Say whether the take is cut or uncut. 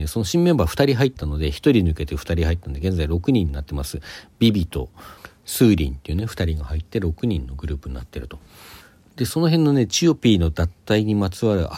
uncut